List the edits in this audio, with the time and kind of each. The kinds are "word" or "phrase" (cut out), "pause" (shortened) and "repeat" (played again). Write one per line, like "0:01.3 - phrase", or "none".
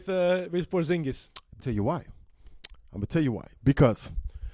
0:01.6 - phrase
0:03.5 - pause